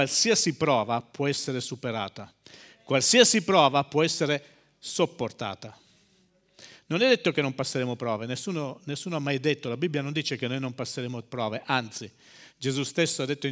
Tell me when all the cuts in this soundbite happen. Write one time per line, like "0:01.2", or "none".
none